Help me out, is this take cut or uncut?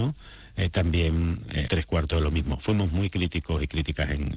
cut